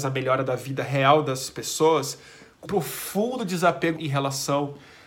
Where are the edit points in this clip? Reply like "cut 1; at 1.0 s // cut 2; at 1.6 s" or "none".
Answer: cut 1; at 2.7 s // cut 2; at 4.0 s